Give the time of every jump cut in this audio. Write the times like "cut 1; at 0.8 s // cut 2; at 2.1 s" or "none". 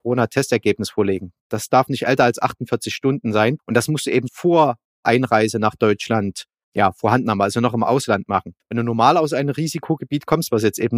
cut 1; at 4.3 s

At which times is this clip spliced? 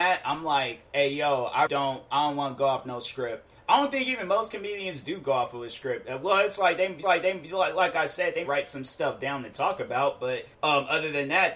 cut 1; at 1.7 s // cut 2; at 7.0 s // cut 3; at 8.4 s // cut 4; at 10.5 s

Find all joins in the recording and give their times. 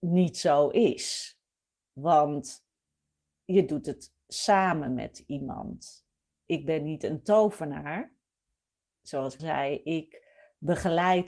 cut 1; at 9.4 s

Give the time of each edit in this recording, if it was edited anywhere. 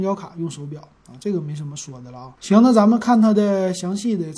cut 1; at 2.4 s

